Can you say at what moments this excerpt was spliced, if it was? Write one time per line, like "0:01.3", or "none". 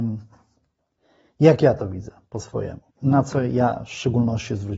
0:02.9